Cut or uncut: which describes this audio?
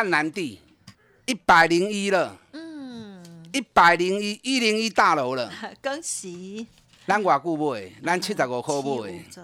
uncut